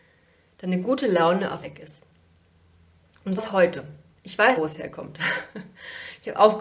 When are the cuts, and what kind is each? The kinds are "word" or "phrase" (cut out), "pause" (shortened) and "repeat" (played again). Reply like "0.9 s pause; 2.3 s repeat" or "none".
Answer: 1.6 s word; 3.4 s word; 4.6 s word